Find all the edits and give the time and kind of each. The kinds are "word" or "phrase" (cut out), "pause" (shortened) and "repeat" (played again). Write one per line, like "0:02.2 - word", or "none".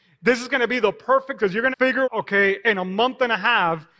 0:01.4 - word
0:01.7 - word
0:02.0 - word